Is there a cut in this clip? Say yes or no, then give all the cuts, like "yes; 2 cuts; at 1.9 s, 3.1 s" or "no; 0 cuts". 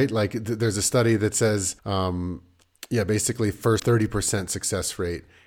yes; 2 cuts; at 1.8 s, 3.8 s